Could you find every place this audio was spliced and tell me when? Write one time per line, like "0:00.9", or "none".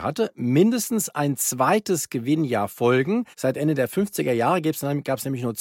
0:03.3